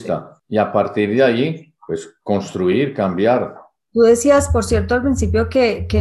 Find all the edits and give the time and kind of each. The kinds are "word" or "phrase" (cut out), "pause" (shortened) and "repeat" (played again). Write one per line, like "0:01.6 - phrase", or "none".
none